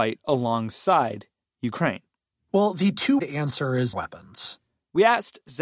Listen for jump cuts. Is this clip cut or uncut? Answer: cut